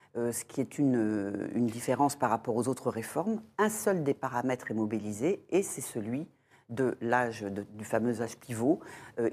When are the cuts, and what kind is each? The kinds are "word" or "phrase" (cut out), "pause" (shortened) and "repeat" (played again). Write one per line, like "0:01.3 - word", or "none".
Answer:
none